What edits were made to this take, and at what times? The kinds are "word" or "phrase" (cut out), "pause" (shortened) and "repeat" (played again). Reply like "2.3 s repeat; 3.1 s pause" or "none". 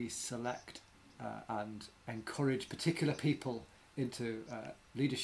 none